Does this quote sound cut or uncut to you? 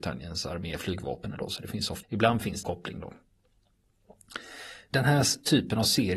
cut